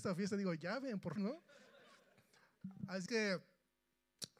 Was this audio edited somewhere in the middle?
yes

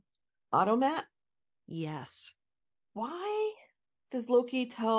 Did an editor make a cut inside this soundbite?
no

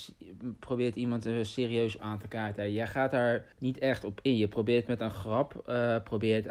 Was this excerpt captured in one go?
no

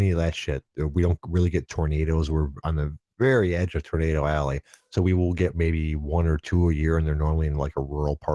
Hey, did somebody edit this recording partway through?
no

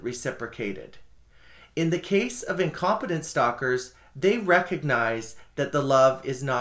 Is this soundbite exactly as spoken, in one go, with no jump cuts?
yes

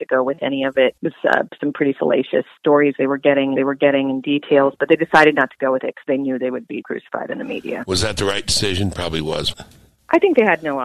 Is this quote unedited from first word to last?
no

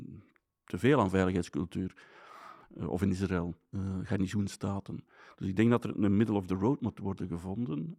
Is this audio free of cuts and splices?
yes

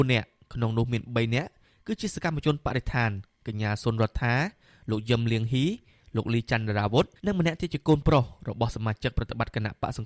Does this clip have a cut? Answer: yes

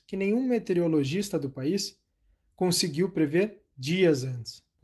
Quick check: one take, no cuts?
yes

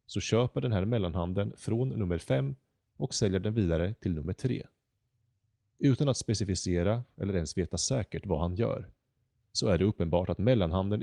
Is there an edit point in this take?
no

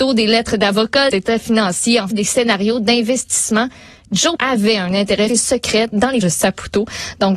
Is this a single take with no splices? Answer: no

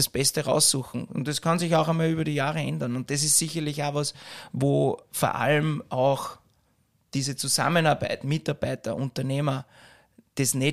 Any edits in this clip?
no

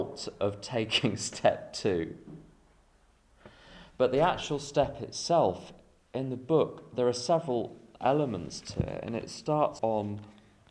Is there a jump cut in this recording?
yes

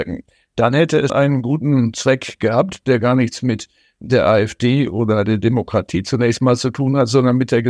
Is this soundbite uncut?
no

